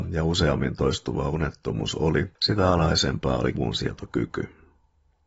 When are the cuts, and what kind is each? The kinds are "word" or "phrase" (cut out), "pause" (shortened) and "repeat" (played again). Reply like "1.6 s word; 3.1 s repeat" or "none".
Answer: 3.5 s word